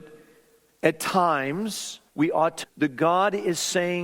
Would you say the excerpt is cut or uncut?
cut